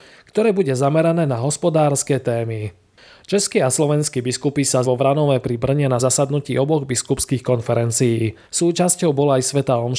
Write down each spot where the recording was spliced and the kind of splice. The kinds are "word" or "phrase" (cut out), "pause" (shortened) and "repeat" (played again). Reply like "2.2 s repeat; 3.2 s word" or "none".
1.3 s word; 4.8 s word; 6.0 s word; 8.4 s pause